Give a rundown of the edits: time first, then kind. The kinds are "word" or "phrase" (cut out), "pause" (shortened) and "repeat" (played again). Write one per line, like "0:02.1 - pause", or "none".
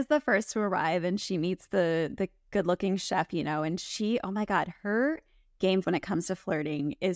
0:05.8 - word

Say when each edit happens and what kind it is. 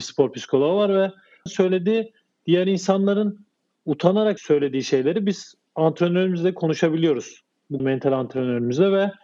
0:01.5 - word
0:04.4 - word
0:07.8 - word

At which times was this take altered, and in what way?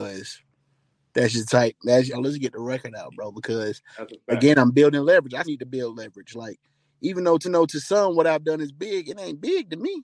0:02.1 - phrase
0:05.4 - word
0:07.4 - repeat

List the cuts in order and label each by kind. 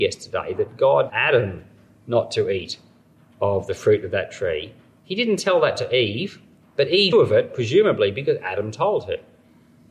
0:01.1 - word
0:07.1 - word

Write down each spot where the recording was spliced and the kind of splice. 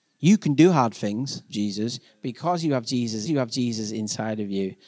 0:01.5 - phrase
0:03.3 - repeat

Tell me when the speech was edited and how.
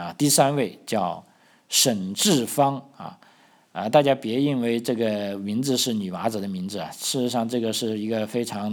none

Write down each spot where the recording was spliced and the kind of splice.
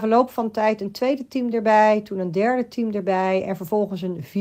none

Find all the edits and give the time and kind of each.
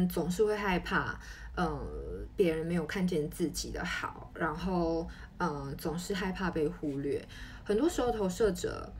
none

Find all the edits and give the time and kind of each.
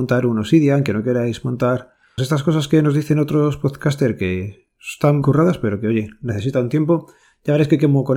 0:02.2 - word
0:05.2 - word

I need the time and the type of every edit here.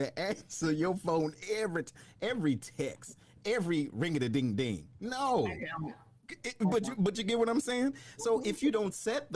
none

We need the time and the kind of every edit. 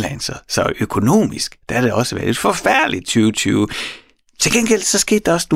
none

